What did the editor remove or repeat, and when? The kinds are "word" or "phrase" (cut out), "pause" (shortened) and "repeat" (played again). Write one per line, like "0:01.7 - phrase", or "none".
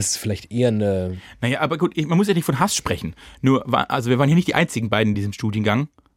none